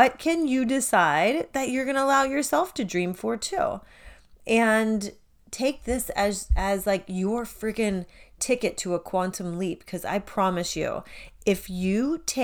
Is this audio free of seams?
yes; 0 cuts

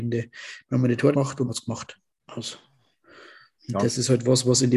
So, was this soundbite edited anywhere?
yes; 3 cuts; at 1.1 s, 1.5 s, 3.6 s

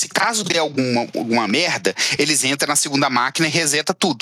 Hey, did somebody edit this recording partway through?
no; 0 cuts

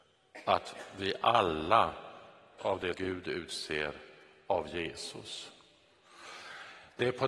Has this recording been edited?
yes; 2 cuts; at 2.6 s, 2.9 s

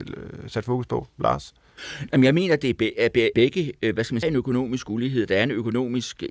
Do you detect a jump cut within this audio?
yes; 2 cuts; at 3.3 s, 4.2 s

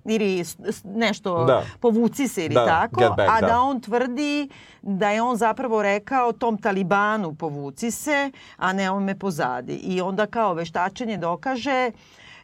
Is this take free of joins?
yes; 0 cuts

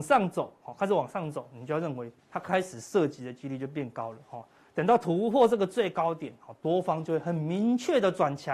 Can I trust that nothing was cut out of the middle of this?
no; 1 cut; at 2.2 s

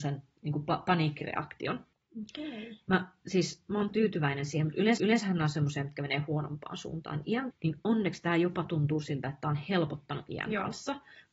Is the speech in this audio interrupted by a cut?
yes; 4 cuts; at 1.9 s, 3.9 s, 5.0 s, 7.5 s

